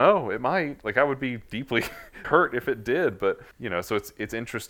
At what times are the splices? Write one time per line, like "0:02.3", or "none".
0:02.2
0:03.5